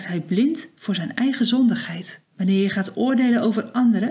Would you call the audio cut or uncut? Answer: cut